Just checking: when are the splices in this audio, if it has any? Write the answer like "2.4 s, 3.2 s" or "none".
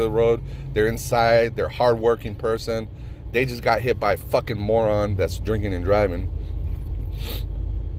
none